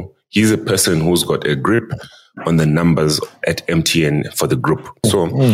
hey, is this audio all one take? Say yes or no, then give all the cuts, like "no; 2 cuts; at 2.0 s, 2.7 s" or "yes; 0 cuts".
yes; 0 cuts